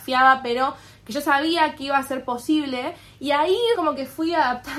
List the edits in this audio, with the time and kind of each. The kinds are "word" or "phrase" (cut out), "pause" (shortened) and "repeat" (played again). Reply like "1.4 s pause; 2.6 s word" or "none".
3.8 s word